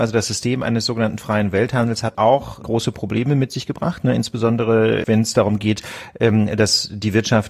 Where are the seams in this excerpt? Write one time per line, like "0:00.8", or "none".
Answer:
0:02.1
0:02.6
0:05.0